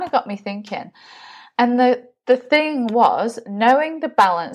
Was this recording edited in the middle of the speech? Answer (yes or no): no